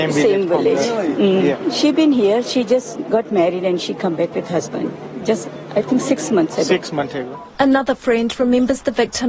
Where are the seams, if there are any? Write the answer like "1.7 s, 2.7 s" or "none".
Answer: 7.5 s